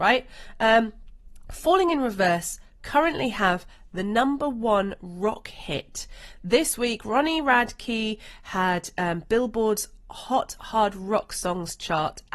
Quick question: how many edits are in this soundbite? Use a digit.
0